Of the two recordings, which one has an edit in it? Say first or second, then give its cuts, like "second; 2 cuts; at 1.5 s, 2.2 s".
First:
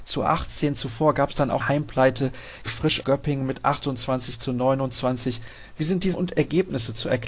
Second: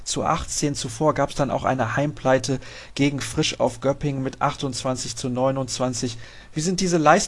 first; 4 cuts; at 1.6 s, 2.7 s, 3.0 s, 6.1 s